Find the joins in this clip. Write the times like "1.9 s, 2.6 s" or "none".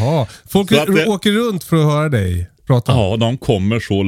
2.6 s